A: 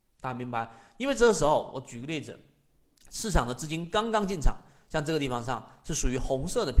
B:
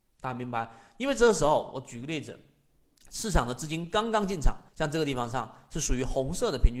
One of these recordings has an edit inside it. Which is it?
B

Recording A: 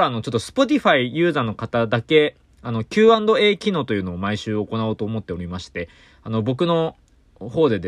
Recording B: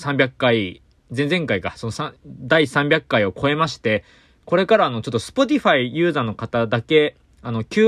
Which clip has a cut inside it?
B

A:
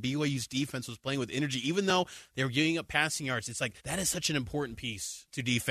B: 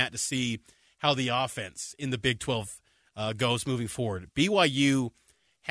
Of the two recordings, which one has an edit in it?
A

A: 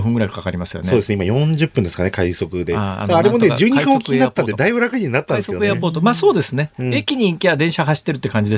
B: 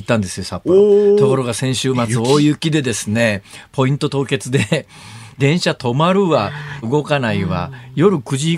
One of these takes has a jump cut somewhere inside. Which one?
B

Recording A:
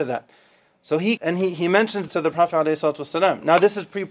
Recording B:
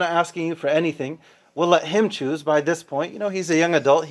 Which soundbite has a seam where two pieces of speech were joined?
A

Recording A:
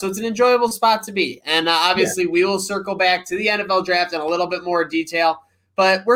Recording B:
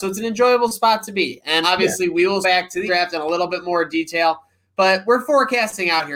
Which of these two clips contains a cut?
B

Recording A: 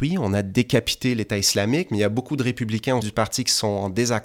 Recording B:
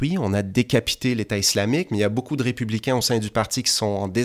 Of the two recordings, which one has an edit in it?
A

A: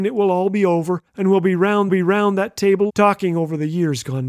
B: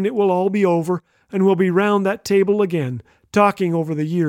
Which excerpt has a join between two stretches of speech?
A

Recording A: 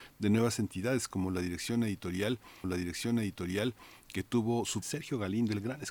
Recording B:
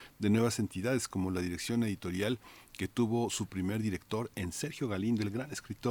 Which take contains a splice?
A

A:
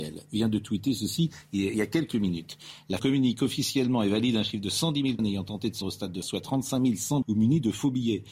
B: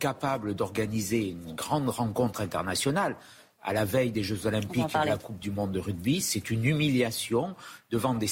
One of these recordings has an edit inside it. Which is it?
A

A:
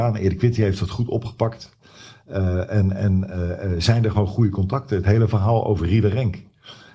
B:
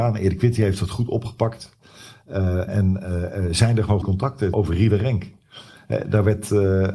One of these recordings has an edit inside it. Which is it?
B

